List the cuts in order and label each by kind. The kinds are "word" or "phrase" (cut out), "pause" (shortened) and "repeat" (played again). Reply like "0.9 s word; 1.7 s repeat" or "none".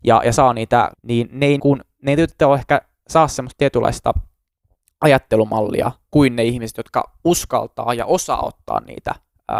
0.9 s word; 1.6 s word

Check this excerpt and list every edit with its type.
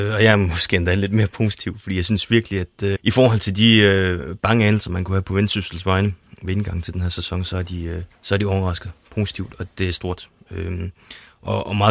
3.0 s word; 8.2 s pause

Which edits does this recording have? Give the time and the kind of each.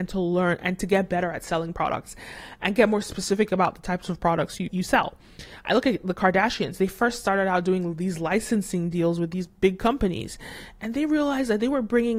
4.7 s word

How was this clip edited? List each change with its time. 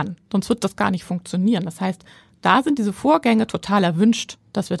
none

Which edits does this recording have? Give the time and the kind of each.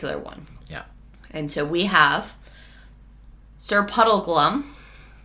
none

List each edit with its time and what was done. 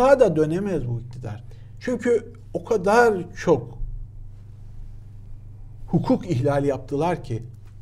none

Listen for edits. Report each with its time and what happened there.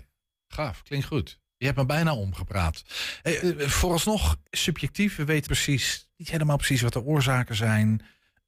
1.5 s pause; 3.4 s word; 4.5 s pause; 5.5 s word

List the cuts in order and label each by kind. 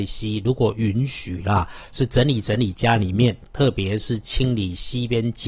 none

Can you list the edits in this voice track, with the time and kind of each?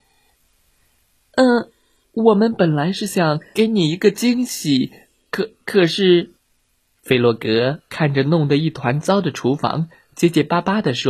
3.5 s word; 5.6 s pause; 6.4 s pause; 7.9 s pause

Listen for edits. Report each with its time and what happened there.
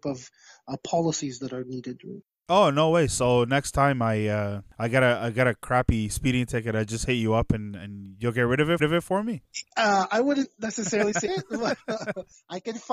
2.3 s pause; 8.8 s repeat; 11.3 s phrase

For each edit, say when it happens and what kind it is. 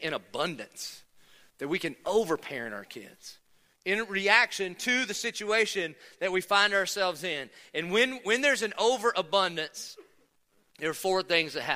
none

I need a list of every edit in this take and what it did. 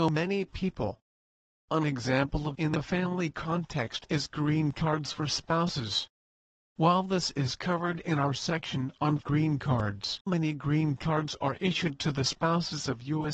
2.5 s word; 9.2 s word; 10.3 s word

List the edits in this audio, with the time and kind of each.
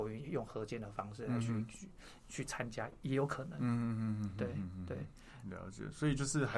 none

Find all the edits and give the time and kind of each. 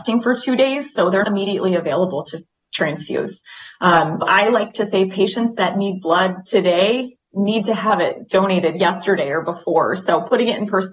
1.2 s word; 4.2 s word

